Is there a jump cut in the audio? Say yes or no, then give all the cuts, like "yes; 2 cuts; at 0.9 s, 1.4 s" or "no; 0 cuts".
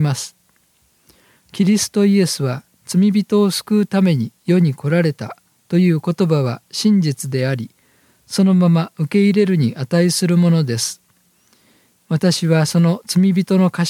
no; 0 cuts